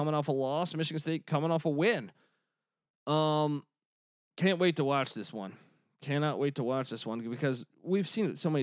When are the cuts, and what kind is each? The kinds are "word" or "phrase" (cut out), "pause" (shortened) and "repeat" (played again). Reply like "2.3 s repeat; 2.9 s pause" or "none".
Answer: none